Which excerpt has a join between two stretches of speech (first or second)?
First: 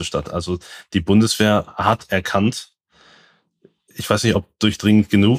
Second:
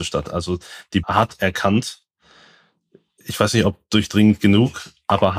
second